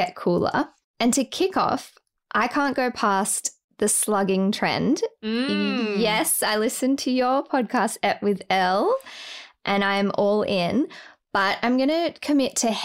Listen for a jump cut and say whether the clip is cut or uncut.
uncut